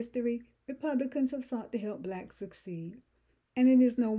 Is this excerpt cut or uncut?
uncut